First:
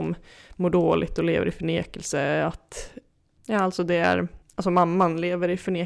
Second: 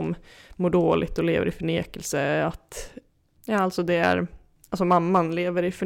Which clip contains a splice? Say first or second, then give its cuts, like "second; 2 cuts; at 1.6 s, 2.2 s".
first; 1 cut; at 4.4 s